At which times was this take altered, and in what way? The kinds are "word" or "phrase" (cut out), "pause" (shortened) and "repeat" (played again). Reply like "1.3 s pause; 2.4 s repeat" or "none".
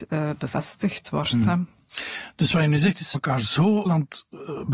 3.1 s word; 3.9 s word